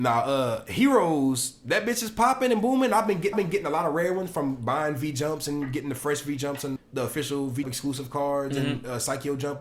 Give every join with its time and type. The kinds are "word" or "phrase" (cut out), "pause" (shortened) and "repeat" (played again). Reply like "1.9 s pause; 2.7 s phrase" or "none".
3.3 s repeat; 6.8 s word; 7.6 s word